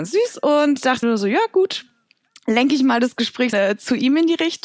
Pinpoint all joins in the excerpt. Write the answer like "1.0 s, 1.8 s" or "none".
1.0 s, 3.5 s